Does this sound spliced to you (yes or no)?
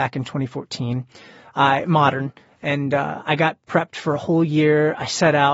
no